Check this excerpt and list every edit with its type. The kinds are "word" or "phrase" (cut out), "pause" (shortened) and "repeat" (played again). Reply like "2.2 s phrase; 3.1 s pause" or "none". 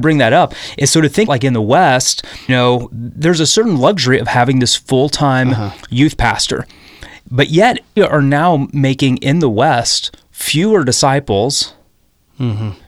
1.3 s word; 2.5 s word; 8.0 s word